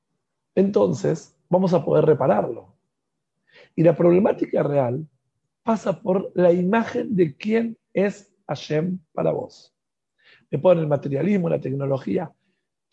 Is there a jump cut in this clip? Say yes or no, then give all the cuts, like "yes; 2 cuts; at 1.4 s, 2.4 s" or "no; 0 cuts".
no; 0 cuts